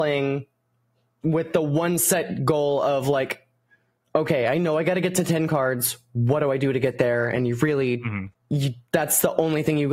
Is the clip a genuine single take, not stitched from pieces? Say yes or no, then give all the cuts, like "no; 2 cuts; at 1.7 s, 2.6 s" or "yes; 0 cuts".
yes; 0 cuts